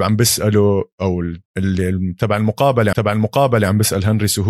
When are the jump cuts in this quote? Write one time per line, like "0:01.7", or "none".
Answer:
0:01.5
0:02.9